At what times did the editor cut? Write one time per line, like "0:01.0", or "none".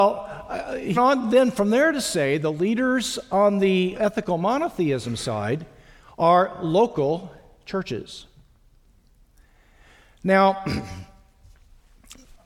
0:00.9
0:03.9